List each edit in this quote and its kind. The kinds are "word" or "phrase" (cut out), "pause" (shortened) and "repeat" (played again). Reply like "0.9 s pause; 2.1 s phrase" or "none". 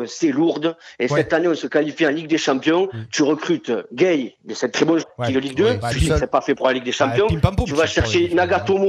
5.0 s word; 5.3 s word